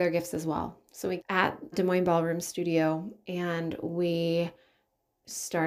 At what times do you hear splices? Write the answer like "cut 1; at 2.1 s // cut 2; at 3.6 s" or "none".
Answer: cut 1; at 1.2 s // cut 2; at 1.7 s